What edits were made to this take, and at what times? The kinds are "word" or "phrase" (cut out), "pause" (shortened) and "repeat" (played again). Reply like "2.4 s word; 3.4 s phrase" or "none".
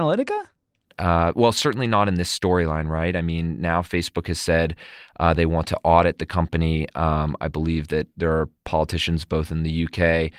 none